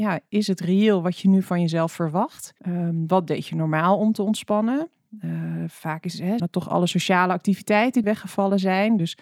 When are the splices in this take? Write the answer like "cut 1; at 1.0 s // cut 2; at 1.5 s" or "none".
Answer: cut 1; at 2.6 s // cut 2; at 6.4 s // cut 3; at 8.0 s